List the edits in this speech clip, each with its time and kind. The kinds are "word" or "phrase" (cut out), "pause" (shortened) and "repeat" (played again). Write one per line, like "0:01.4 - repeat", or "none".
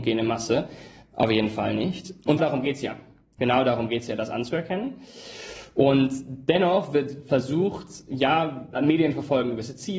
0:02.4 - word
0:08.7 - word